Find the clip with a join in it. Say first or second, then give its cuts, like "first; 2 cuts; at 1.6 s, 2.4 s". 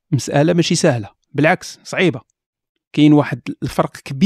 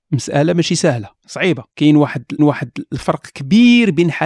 second; 3 cuts; at 1.2 s, 1.7 s, 2.4 s